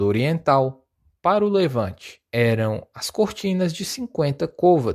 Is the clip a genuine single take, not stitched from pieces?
no; 1 cut; at 2.3 s

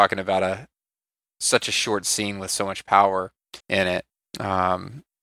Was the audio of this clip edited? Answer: yes; 2 cuts; at 3.6 s, 4.3 s

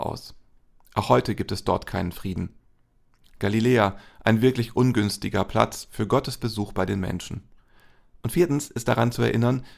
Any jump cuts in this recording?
no; 0 cuts

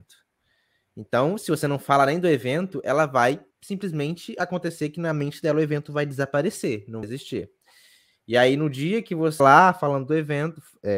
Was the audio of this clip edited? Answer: yes; 3 cuts; at 3.5 s, 7.0 s, 9.4 s

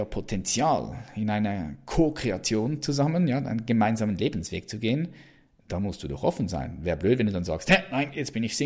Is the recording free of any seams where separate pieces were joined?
yes; 0 cuts

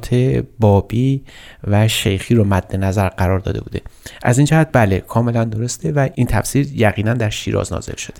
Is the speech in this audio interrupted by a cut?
no; 0 cuts

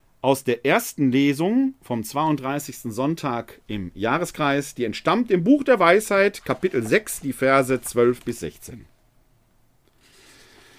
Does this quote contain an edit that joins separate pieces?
no; 0 cuts

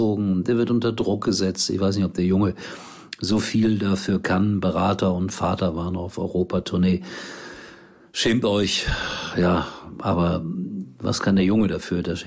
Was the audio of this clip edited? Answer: no; 0 cuts

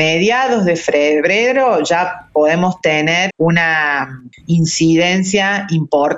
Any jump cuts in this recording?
yes; 1 cut; at 3.3 s

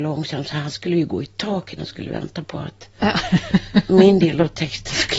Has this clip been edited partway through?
yes; 1 cut; at 1.8 s

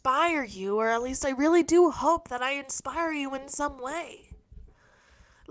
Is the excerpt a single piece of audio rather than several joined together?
yes; 0 cuts

